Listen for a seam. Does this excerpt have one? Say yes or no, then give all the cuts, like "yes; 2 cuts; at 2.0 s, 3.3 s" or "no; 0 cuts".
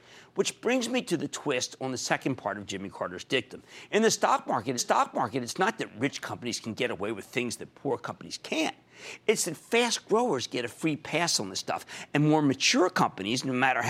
yes; 1 cut; at 4.8 s